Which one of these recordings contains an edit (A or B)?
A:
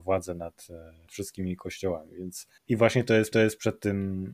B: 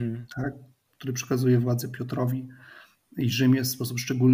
A